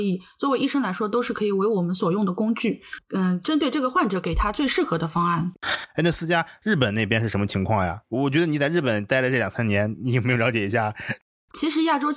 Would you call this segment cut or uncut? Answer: uncut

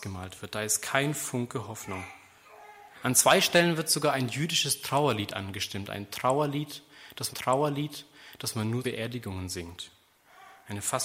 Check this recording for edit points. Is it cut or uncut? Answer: cut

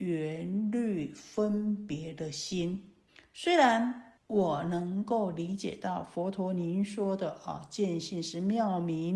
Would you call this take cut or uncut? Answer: cut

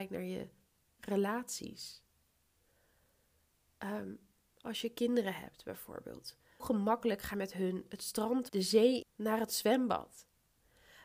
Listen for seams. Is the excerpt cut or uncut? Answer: cut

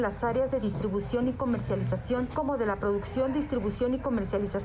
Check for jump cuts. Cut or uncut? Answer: cut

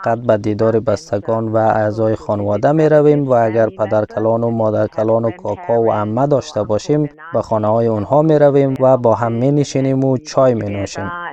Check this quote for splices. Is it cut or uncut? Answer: uncut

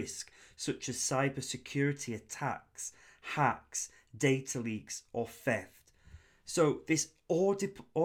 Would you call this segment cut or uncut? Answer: uncut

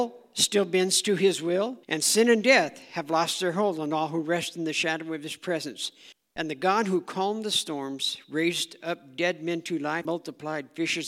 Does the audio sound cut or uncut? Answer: cut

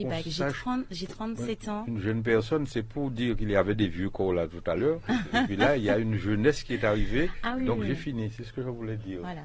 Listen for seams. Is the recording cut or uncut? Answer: uncut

